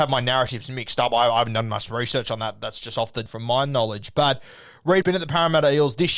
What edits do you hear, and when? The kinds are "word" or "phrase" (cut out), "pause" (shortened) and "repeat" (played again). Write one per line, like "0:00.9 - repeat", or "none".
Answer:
0:03.3 - word
0:05.0 - word